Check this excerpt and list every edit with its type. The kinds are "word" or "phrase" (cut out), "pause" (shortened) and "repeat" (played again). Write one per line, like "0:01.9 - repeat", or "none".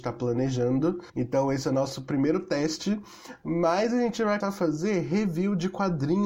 0:01.1 - pause
0:04.4 - word

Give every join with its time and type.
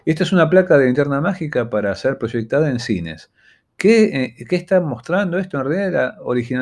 none

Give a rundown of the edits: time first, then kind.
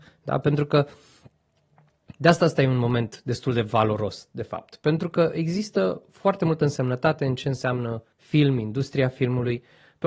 0:08.1 - pause

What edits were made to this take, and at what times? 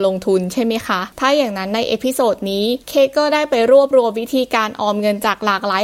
0:01.1 - pause
0:02.8 - pause

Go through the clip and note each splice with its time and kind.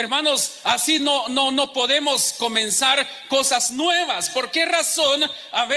none

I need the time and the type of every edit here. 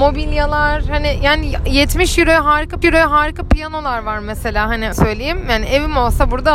0:02.8 - repeat
0:04.9 - word

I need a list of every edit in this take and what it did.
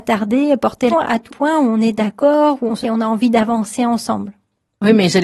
0:00.9 - word
0:01.3 - word
0:02.8 - phrase

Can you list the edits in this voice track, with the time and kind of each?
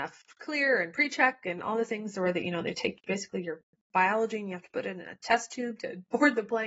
none

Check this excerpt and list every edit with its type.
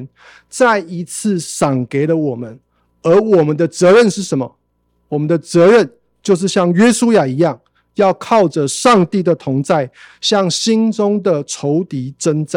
none

